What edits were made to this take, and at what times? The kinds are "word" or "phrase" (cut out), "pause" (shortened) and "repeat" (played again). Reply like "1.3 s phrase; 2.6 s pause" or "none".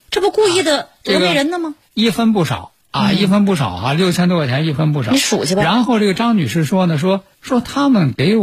7.3 s pause